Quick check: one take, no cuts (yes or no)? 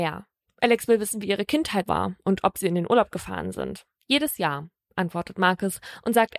no